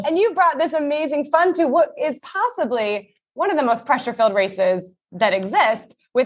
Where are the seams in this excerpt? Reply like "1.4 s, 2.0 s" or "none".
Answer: none